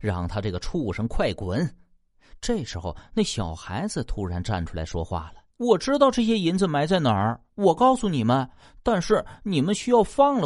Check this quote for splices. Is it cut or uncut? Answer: cut